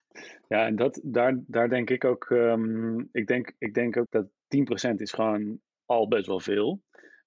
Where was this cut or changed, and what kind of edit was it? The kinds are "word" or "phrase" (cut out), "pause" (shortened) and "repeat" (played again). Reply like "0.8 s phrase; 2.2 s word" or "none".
4.1 s phrase